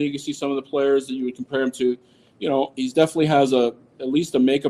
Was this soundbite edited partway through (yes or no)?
no